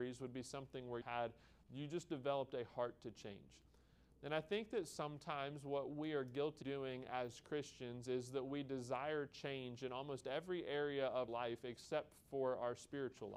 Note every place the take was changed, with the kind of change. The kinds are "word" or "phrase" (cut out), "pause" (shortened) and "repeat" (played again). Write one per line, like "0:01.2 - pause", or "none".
0:01.0 - word
0:01.6 - word
0:06.6 - word
0:11.3 - word